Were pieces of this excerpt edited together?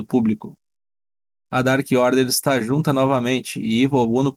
no; 0 cuts

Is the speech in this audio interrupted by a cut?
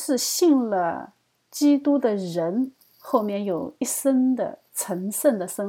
no; 0 cuts

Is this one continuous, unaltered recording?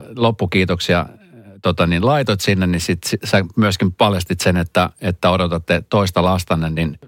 yes; 0 cuts

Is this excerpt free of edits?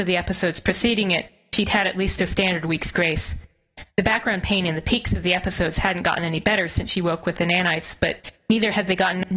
yes; 0 cuts

